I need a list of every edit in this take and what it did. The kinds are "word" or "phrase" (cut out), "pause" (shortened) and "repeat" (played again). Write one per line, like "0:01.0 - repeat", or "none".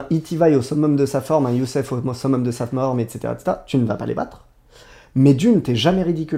none